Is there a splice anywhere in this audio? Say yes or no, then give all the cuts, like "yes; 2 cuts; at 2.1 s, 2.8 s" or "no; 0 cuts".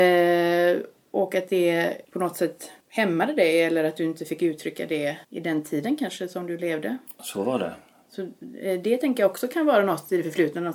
yes; 3 cuts; at 2.0 s, 2.8 s, 5.2 s